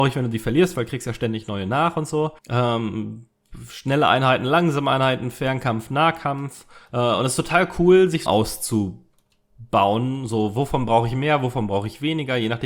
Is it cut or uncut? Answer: cut